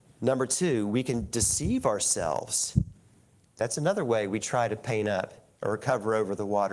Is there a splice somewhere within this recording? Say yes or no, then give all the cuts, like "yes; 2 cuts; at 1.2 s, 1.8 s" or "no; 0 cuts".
no; 0 cuts